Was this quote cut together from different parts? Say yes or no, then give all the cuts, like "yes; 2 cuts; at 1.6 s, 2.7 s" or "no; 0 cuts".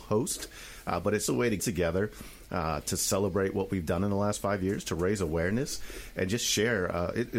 yes; 2 cuts; at 1.3 s, 1.6 s